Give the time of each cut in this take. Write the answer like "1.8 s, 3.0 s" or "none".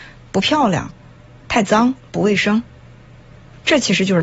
none